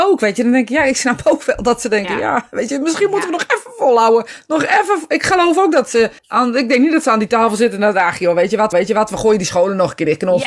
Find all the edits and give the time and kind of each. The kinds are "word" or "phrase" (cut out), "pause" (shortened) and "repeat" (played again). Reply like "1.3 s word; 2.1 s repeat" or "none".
6.2 s pause; 8.7 s repeat